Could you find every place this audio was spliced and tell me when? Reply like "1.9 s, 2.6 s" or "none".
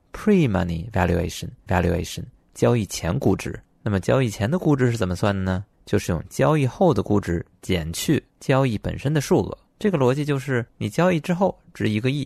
1.7 s, 10.7 s